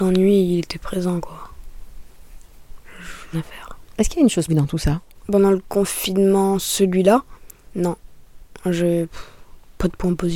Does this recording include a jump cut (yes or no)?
yes